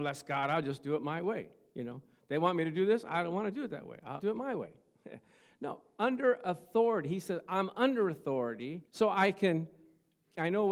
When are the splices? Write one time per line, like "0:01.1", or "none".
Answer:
0:04.2
0:08.9